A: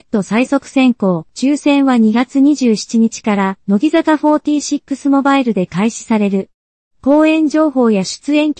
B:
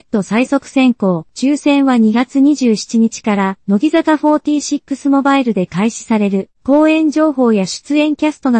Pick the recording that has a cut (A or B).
B